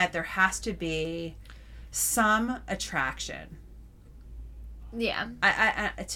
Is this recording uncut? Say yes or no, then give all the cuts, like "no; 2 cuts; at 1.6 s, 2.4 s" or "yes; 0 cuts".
yes; 0 cuts